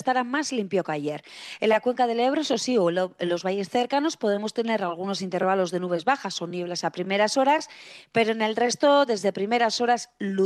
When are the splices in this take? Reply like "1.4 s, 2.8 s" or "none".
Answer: none